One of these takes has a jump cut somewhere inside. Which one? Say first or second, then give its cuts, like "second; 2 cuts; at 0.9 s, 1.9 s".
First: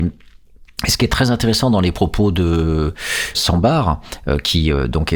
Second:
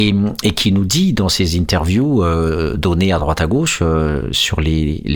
first; 1 cut; at 3.3 s